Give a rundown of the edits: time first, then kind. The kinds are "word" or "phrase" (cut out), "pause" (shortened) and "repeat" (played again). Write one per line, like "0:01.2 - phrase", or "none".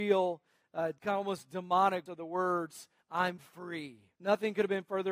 0:01.0 - pause
0:02.1 - word
0:04.2 - pause